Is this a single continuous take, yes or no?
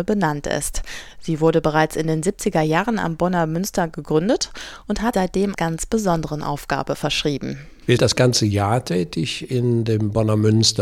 no